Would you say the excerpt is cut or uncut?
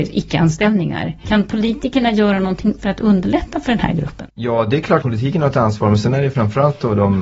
cut